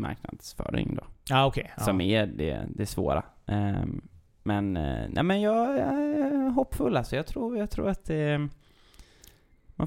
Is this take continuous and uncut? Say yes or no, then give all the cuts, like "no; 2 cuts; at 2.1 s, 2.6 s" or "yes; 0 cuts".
yes; 0 cuts